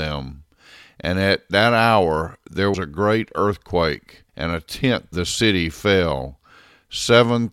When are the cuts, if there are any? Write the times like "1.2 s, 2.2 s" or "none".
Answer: 2.7 s, 4.3 s, 5.1 s